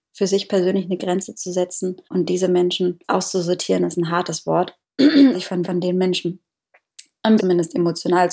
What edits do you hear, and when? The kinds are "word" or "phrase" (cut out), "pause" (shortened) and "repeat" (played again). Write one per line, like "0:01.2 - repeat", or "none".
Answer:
0:02.0 - pause
0:03.0 - pause
0:05.3 - word
0:05.6 - repeat
0:07.4 - word